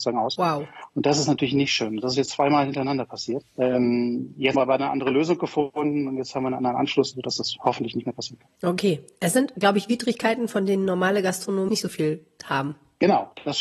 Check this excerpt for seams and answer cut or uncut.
cut